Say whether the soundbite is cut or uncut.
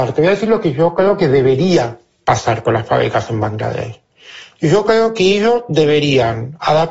uncut